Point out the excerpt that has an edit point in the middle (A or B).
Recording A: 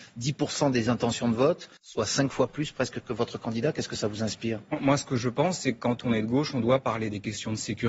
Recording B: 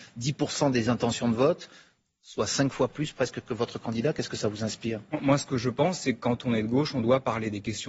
A